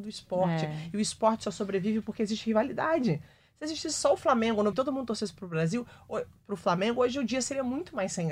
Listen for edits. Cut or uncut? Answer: cut